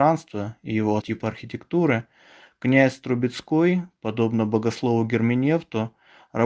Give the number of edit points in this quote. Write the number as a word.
one